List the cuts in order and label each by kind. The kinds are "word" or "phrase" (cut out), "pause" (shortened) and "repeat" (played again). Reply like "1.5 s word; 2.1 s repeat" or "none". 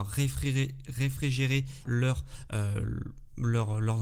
1.8 s word